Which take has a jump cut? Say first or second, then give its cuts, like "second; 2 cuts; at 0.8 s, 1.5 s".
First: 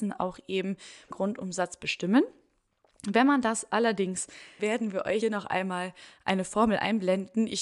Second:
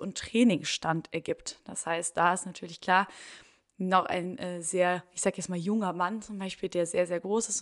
first; 3 cuts; at 1.1 s, 4.6 s, 5.2 s